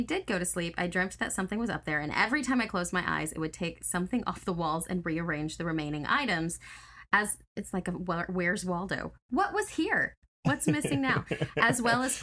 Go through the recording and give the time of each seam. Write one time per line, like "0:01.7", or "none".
none